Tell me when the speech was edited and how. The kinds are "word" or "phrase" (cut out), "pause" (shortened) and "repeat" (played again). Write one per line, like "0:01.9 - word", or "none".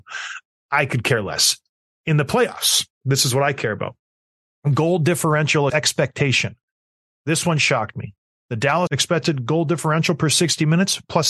0:05.7 - word
0:08.9 - word